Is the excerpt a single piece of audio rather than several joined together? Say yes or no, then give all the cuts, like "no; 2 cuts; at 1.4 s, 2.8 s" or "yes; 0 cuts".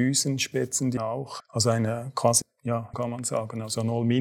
no; 4 cuts; at 1.0 s, 1.4 s, 2.4 s, 2.9 s